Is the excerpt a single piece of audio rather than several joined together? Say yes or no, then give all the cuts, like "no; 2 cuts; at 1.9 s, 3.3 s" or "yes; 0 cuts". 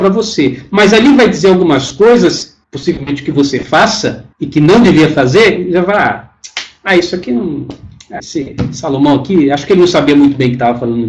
no; 3 cuts; at 2.6 s, 4.3 s, 8.2 s